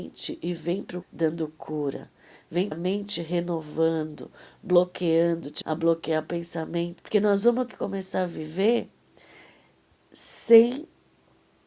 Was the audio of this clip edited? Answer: yes; 5 cuts; at 1.0 s, 2.7 s, 5.6 s, 7.0 s, 7.7 s

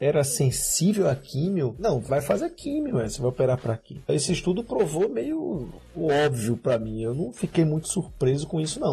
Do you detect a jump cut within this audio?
no; 0 cuts

